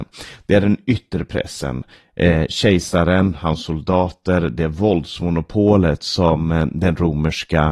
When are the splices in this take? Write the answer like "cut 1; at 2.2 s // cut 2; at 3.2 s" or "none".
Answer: none